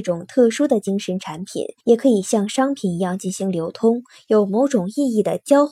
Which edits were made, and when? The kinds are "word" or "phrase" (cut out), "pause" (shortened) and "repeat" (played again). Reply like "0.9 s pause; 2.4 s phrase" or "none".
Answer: 1.8 s pause